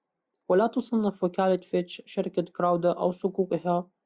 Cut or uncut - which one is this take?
uncut